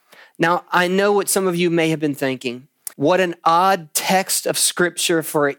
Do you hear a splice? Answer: yes; 1 cut; at 2.9 s

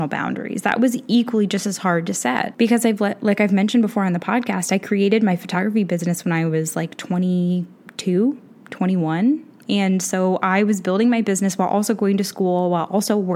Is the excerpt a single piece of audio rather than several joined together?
yes; 0 cuts

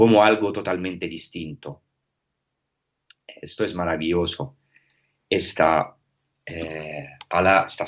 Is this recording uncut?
yes; 0 cuts

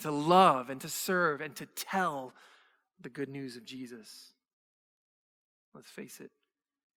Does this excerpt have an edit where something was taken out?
no; 0 cuts

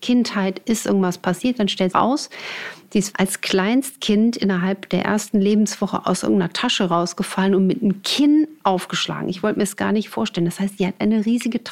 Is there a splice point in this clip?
yes; 2 cuts; at 1.9 s, 3.1 s

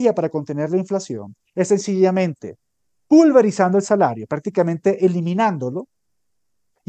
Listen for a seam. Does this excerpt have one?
no; 0 cuts

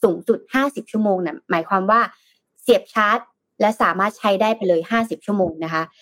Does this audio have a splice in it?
no; 0 cuts

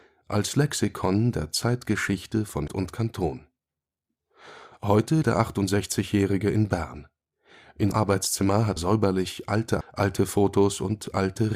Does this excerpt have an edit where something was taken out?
yes; 5 cuts; at 2.7 s, 5.2 s, 7.9 s, 8.8 s, 9.8 s

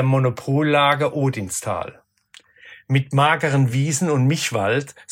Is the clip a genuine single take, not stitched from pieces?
yes; 0 cuts

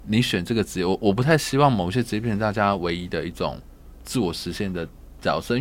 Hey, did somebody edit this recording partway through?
no; 0 cuts

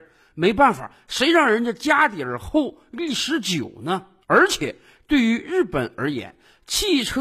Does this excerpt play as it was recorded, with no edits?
yes; 0 cuts

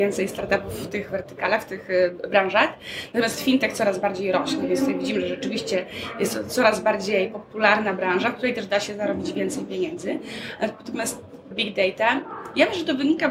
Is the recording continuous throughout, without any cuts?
no; 1 cut; at 11.5 s

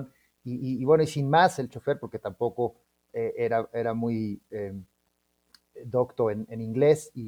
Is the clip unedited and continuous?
yes; 0 cuts

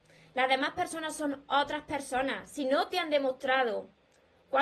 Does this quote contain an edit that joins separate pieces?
no; 0 cuts

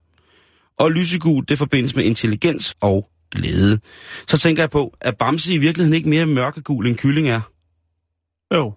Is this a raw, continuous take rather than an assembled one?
no; 1 cut; at 2.7 s

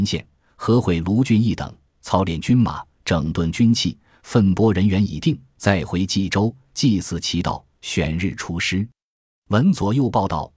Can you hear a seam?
no; 0 cuts

